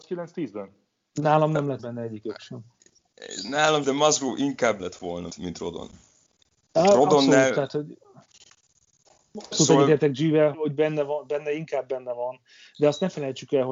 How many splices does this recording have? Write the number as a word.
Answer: six